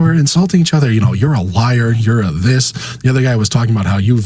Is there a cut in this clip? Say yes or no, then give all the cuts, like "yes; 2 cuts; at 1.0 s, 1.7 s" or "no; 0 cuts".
no; 0 cuts